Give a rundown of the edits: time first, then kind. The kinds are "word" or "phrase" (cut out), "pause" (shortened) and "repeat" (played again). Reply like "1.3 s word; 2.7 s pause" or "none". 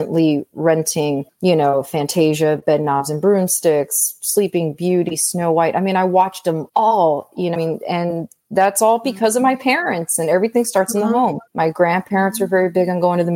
1.3 s pause; 6.7 s pause; 7.6 s word; 11.5 s pause